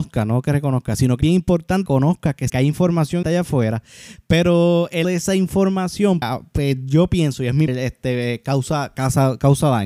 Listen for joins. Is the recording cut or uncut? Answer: cut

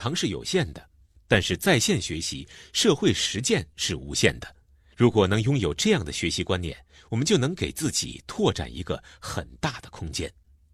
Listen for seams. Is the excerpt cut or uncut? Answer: uncut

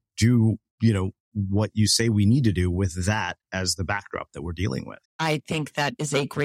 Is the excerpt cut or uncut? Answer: cut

